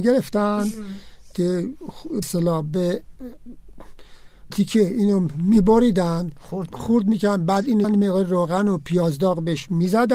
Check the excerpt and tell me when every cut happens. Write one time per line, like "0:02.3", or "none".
0:02.2
0:04.5
0:06.7
0:07.8